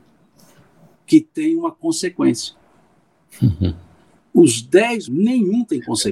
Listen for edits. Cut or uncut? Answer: cut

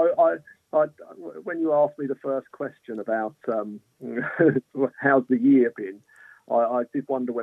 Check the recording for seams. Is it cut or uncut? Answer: uncut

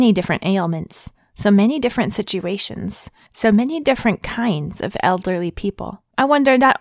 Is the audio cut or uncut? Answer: uncut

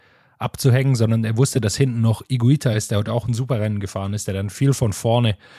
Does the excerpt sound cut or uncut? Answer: uncut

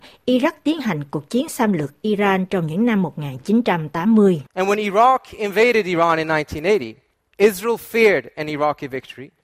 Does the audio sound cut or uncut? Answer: cut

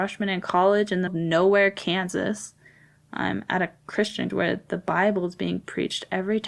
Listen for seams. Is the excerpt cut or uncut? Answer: cut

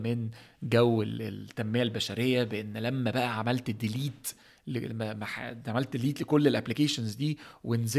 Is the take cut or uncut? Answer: uncut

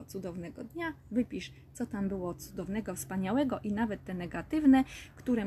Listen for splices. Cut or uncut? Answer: uncut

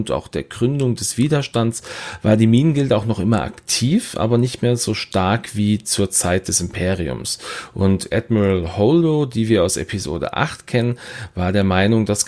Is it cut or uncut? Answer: uncut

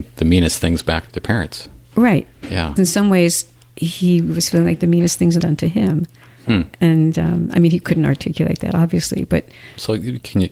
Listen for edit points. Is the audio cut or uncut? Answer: cut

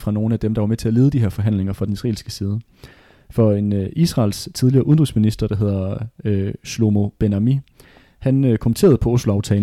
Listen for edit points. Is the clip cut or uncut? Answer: uncut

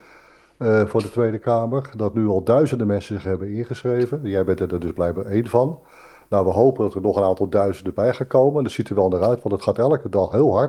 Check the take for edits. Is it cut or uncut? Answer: uncut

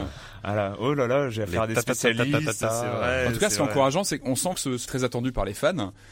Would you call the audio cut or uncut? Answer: cut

